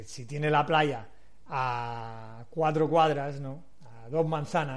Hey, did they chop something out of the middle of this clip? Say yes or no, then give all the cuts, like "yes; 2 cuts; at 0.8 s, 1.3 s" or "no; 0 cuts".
no; 0 cuts